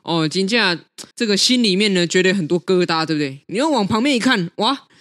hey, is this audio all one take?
no; 1 cut; at 1.1 s

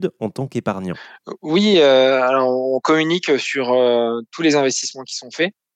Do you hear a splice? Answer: no; 0 cuts

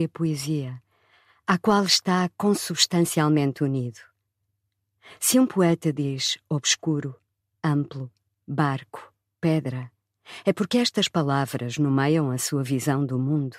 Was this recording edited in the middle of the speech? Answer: no; 0 cuts

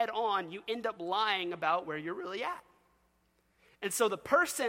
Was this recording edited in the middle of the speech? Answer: no; 0 cuts

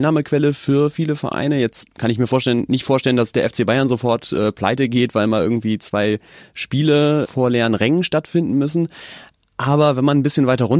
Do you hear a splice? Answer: no; 0 cuts

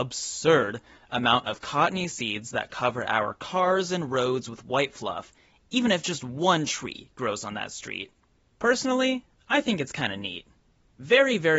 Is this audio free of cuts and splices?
yes; 0 cuts

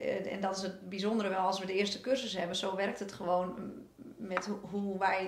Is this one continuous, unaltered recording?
yes; 0 cuts

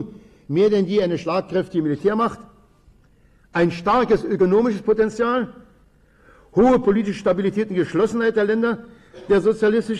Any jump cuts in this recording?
no; 0 cuts

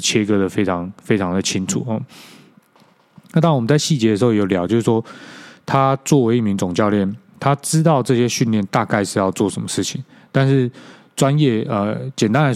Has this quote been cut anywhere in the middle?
no; 0 cuts

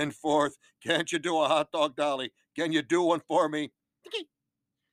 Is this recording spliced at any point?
no; 0 cuts

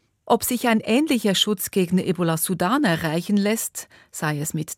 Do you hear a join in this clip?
no; 0 cuts

